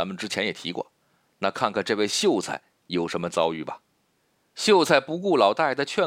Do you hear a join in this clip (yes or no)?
no